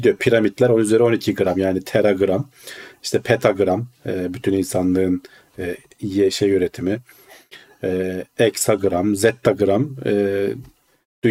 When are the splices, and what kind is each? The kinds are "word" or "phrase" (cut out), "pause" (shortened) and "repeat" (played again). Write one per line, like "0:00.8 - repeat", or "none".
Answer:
none